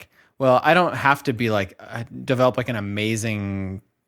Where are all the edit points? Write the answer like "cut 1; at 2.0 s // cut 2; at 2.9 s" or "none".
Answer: none